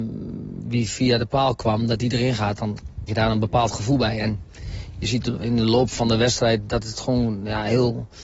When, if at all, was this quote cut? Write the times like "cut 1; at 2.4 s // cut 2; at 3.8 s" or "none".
cut 1; at 3.1 s